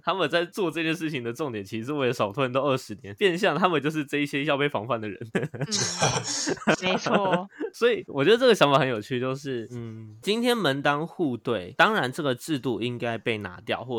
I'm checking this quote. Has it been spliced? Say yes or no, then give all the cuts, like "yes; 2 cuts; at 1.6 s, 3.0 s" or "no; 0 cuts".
no; 0 cuts